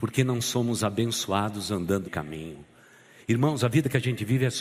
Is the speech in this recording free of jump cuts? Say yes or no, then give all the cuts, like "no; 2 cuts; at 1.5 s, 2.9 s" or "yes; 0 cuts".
no; 1 cut; at 2.0 s